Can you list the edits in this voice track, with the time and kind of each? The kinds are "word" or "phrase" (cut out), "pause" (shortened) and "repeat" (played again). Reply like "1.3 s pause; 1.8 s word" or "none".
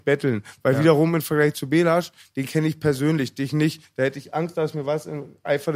none